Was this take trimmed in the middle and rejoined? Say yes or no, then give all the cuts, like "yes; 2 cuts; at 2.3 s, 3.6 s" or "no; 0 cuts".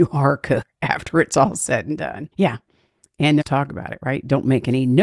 yes; 2 cuts; at 2.3 s, 3.4 s